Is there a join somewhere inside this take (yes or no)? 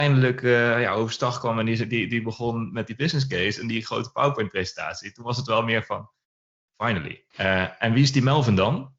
yes